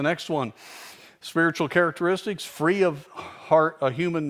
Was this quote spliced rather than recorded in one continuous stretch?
no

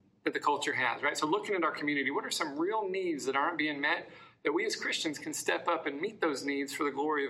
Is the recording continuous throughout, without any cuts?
yes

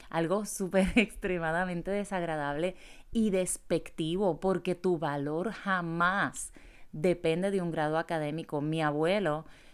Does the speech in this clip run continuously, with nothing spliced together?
yes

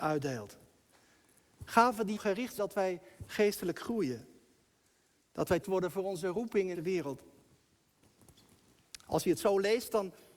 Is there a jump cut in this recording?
yes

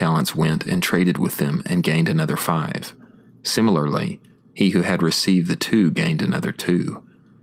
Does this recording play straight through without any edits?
yes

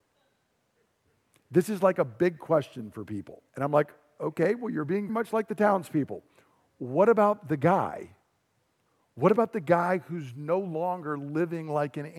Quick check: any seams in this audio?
yes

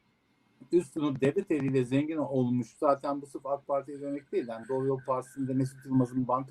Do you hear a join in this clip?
no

